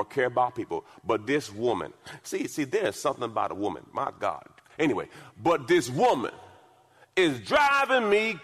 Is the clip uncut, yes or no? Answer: yes